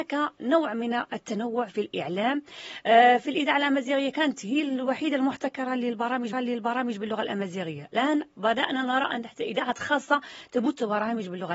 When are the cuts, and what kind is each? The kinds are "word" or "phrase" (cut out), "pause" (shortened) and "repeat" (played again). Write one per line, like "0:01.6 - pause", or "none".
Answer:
0:06.3 - repeat